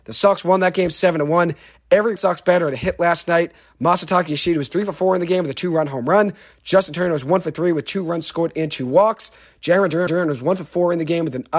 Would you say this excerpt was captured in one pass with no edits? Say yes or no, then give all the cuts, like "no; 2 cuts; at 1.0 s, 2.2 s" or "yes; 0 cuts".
no; 2 cuts; at 2.2 s, 10.1 s